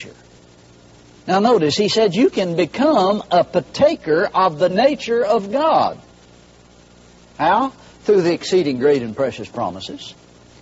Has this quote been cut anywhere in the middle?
yes; 1 cut; at 4.7 s

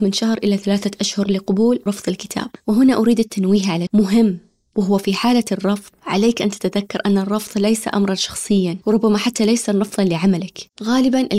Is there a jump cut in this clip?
yes; 4 cuts; at 1.9 s, 2.6 s, 3.9 s, 8.8 s

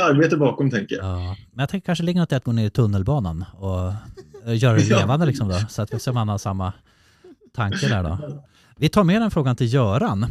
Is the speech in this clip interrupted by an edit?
no; 0 cuts

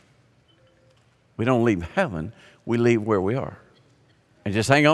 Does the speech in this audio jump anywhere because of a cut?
no; 0 cuts

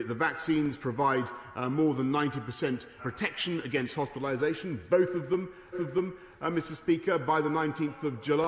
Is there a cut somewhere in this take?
yes; 2 cuts; at 3.0 s, 5.7 s

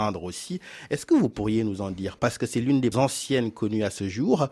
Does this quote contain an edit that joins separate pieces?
yes; 2 cuts; at 2.2 s, 2.9 s

